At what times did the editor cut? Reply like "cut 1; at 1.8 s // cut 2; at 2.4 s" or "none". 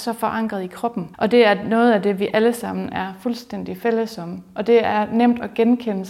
cut 1; at 1.1 s